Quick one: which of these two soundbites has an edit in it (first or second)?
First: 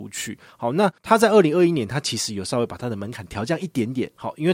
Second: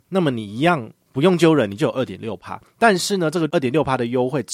first